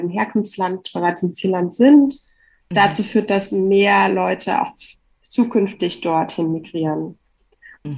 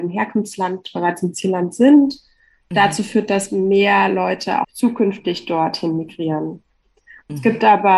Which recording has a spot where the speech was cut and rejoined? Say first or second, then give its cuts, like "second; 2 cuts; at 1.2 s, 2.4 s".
second; 1 cut; at 4.6 s